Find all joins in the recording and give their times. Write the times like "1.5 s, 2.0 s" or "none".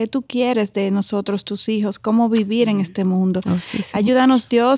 none